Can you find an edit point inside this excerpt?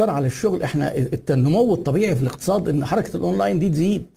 no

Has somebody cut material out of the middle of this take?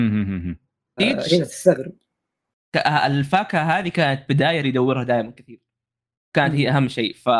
yes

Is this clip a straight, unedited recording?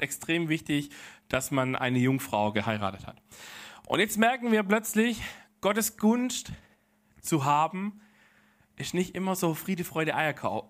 yes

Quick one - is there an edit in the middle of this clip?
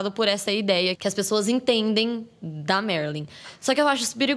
yes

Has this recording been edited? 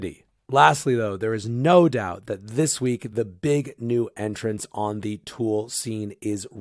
no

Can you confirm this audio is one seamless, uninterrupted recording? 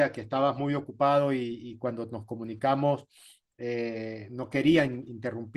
yes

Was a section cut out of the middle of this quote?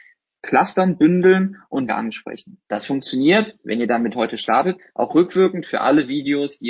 yes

